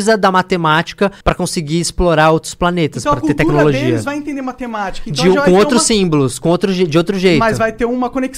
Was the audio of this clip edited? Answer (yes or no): yes